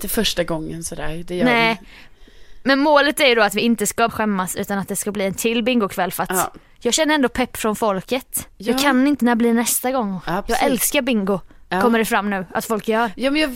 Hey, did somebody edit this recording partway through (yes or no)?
yes